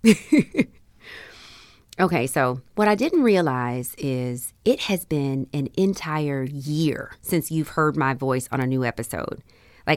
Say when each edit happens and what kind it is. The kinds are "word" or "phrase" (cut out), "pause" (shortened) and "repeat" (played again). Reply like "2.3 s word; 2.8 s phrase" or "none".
2.7 s pause; 7.2 s pause